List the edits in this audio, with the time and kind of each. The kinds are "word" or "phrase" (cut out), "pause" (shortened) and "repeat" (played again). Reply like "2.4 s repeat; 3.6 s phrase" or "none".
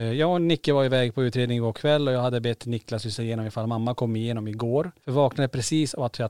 none